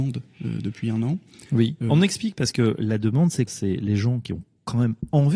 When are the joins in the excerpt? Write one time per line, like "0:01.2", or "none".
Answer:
0:03.5